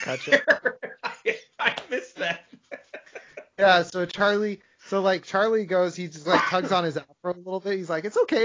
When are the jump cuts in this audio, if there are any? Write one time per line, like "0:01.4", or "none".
none